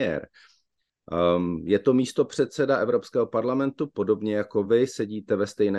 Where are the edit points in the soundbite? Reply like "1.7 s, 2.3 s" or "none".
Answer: none